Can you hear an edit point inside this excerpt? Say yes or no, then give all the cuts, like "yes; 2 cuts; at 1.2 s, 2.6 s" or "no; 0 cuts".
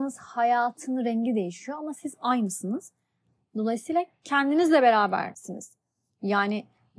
no; 0 cuts